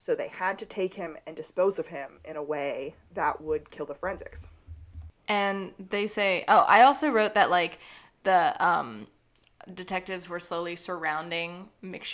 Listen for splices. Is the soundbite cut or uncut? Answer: cut